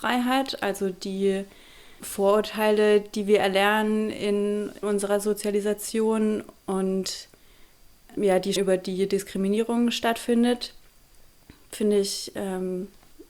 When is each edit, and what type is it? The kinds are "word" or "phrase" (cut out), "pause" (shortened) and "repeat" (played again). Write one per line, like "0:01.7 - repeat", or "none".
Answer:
0:02.0 - word
0:04.8 - word
0:08.2 - word
0:08.6 - word